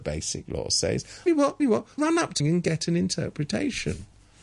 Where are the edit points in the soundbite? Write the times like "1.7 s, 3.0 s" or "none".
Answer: 1.3 s, 1.6 s, 2.0 s, 2.4 s